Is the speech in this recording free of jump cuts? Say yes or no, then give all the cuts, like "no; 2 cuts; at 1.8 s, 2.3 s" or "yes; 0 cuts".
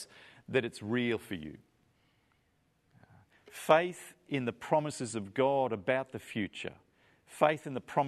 yes; 0 cuts